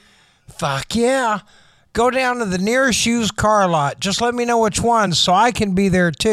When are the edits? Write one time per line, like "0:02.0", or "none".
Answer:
none